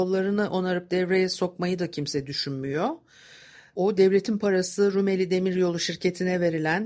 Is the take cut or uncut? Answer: uncut